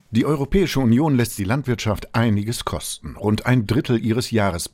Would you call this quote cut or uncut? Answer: cut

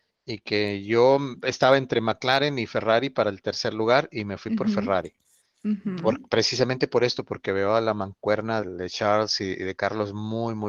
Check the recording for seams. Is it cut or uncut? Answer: cut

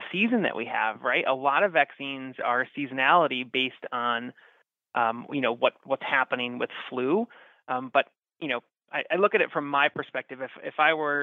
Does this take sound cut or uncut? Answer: uncut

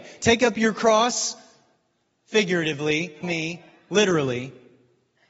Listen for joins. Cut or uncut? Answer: cut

